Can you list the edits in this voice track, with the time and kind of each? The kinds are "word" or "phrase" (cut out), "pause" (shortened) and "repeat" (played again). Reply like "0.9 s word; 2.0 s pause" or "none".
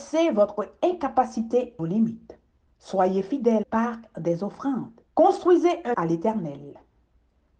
1.8 s word; 2.7 s pause; 3.6 s phrase; 5.1 s pause; 5.9 s word